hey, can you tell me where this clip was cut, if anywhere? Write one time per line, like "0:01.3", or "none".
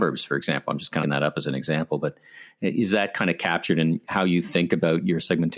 0:01.0